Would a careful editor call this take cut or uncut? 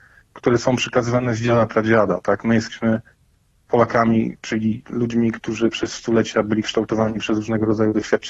uncut